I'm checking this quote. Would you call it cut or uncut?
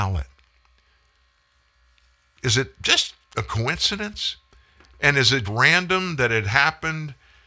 cut